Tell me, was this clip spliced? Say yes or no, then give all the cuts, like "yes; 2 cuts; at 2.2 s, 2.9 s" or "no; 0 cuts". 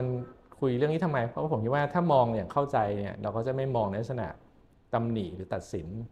no; 0 cuts